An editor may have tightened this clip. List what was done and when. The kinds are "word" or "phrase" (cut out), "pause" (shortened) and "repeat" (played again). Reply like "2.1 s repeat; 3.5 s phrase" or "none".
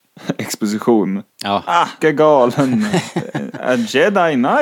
2.0 s word